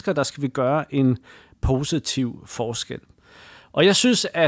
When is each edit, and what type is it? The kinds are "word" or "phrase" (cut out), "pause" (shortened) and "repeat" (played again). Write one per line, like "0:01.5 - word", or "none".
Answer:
none